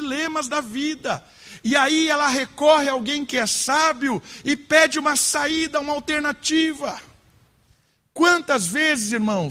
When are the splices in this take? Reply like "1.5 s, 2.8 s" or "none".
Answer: none